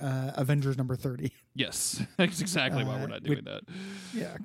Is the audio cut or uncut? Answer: uncut